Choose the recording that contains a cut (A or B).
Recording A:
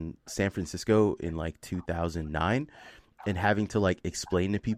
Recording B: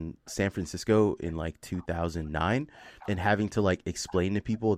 B